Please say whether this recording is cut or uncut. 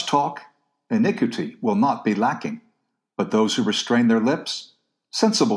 uncut